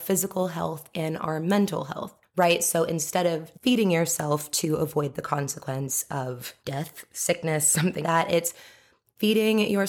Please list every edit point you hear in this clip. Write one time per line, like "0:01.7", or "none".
0:03.5
0:06.6
0:08.0

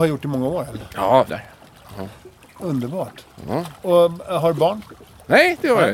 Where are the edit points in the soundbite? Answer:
0:01.3

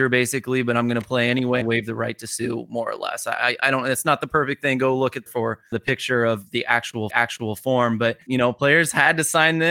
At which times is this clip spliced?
0:01.6
0:05.3
0:05.7
0:07.1
0:08.3

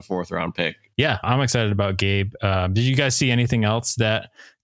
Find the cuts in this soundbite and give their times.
0:01.2

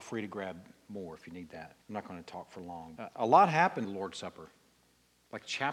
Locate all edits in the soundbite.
0:01.8
0:03.0
0:03.8

